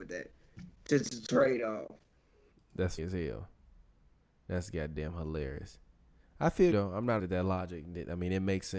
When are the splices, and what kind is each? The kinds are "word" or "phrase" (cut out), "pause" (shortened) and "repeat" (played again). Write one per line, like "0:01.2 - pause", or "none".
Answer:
0:03.0 - word
0:06.7 - word
0:07.2 - word